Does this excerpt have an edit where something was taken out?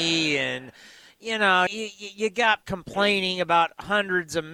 yes; 2 cuts; at 1.7 s, 2.6 s

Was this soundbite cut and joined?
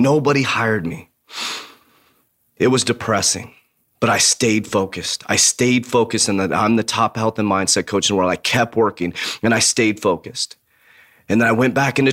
no; 0 cuts

